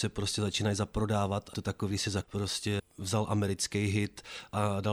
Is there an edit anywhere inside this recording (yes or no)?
yes